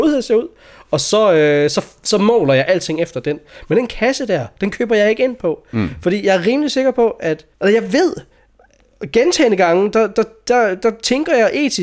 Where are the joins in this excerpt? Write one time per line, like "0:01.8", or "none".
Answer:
0:07.5